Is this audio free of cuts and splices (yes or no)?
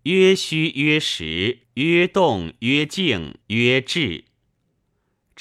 no